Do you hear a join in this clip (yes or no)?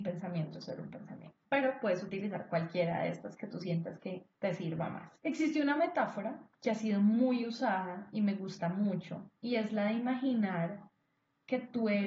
yes